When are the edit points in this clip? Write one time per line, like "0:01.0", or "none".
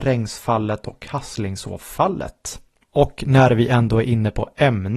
none